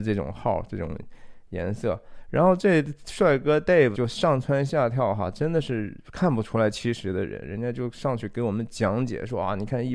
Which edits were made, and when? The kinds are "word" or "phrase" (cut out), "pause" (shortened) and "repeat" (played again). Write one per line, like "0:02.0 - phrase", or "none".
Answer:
0:03.9 - word